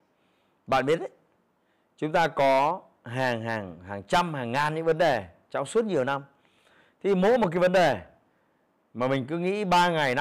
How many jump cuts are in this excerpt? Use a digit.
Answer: 0